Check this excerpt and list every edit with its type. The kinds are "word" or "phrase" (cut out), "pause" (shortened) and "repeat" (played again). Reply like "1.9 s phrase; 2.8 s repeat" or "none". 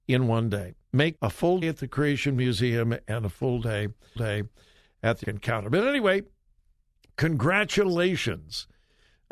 1.2 s phrase; 1.6 s word; 4.2 s repeat; 5.2 s word